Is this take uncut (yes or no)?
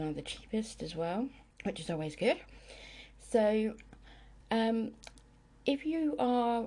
no